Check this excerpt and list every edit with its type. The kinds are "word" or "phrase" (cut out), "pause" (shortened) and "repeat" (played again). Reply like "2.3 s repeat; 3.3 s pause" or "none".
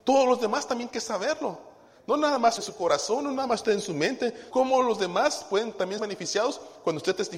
0.9 s word; 2.6 s word; 4.5 s word; 6.0 s word